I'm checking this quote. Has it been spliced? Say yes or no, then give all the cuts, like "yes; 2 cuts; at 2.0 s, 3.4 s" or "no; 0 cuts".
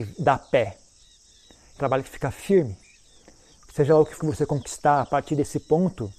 yes; 2 cuts; at 1.8 s, 4.2 s